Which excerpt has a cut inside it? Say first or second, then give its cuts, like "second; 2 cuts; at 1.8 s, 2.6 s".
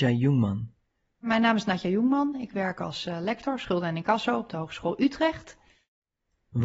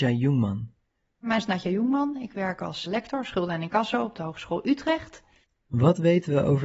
second; 3 cuts; at 1.4 s, 2.9 s, 5.4 s